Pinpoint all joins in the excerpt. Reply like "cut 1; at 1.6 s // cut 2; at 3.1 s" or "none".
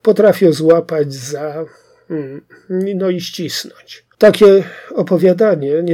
cut 1; at 4.1 s